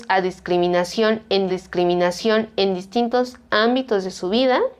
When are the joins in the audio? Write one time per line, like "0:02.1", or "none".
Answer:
0:01.5